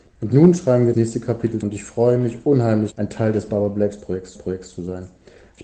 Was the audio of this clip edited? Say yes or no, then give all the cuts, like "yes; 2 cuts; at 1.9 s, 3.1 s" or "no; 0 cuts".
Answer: yes; 4 cuts; at 0.9 s, 1.6 s, 2.9 s, 4.4 s